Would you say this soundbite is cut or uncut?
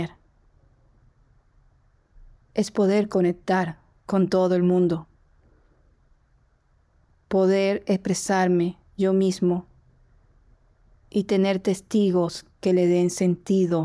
uncut